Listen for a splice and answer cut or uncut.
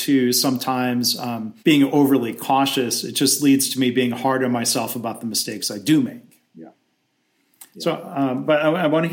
cut